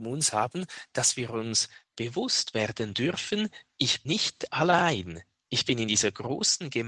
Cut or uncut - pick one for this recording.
cut